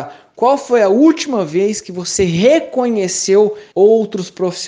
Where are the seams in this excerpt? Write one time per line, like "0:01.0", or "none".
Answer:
0:03.7